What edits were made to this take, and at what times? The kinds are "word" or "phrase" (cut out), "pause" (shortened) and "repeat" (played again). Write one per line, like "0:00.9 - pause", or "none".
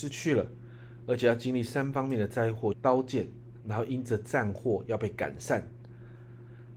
0:02.7 - phrase